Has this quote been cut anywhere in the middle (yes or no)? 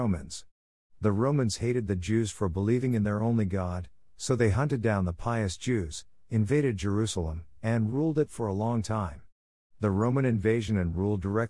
no